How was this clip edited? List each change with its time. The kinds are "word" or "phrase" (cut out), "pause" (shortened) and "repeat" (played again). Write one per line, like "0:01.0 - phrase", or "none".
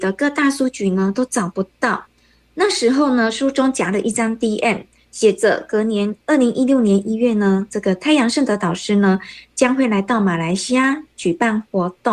none